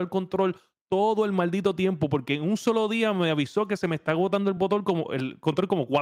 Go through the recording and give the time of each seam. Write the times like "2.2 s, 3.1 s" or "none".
none